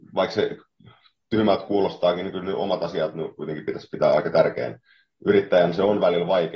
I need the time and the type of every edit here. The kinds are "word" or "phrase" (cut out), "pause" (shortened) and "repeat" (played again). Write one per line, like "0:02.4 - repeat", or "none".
none